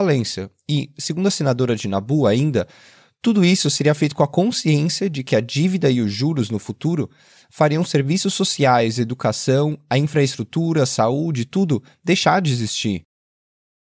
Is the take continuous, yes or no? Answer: yes